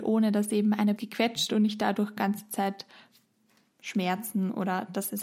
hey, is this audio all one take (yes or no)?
no